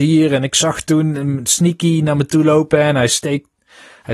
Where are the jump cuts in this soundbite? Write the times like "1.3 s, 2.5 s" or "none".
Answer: none

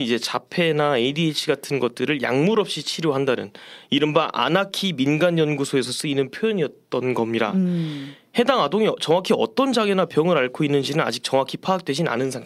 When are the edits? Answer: none

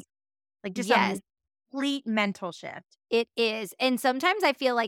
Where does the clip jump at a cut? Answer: 3.0 s

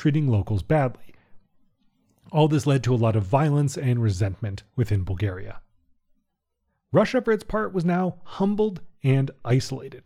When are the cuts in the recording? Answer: none

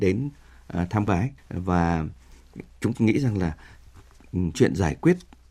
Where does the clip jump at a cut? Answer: 1.1 s, 1.4 s, 2.9 s, 4.5 s

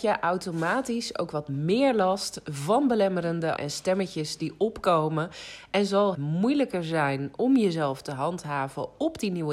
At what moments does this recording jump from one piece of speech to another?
3.6 s, 6.1 s

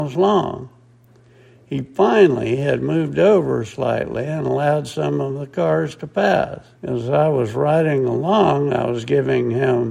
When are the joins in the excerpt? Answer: 6.7 s

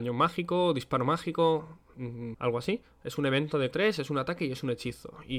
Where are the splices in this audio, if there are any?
2.3 s, 3.7 s

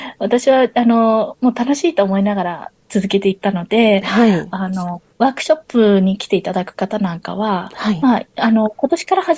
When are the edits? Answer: 5.1 s

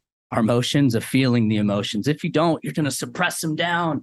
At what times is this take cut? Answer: 2.7 s

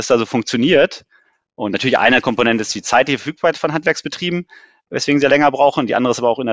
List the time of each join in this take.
none

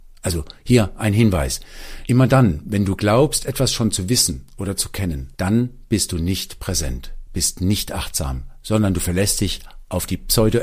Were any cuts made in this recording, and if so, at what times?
5.3 s

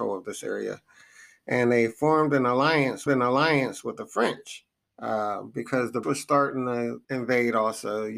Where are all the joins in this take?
3.1 s, 4.8 s, 6.0 s, 7.0 s

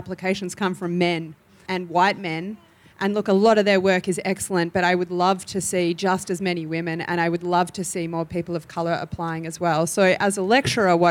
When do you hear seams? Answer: 1.7 s

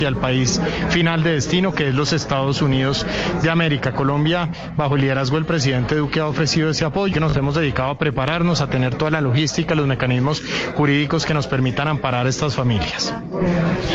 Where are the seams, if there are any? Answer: 7.1 s

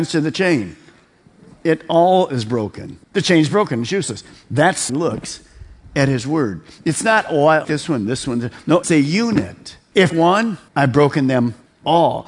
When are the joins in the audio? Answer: 3.0 s, 4.9 s, 7.6 s, 8.8 s, 10.1 s, 10.7 s

